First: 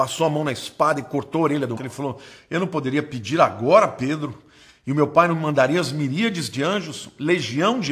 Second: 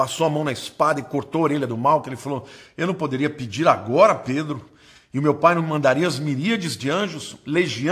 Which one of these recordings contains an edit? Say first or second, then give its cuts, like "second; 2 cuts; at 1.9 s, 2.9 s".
first; 1 cut; at 1.8 s